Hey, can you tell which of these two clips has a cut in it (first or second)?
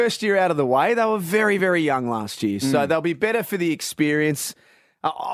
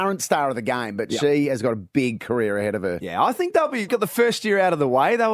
second